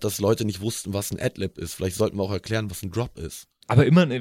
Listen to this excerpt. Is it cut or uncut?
uncut